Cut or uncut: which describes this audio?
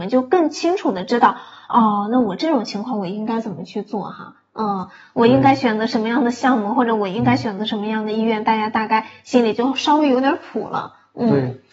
uncut